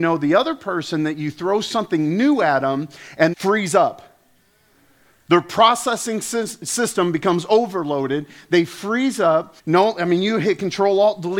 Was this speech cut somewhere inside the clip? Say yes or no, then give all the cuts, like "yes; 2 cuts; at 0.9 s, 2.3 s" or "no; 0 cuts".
yes; 2 cuts; at 3.3 s, 9.6 s